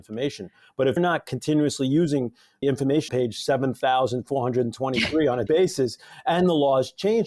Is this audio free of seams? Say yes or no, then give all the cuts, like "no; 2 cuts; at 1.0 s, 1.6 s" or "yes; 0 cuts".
no; 4 cuts; at 1.0 s, 2.6 s, 3.1 s, 5.5 s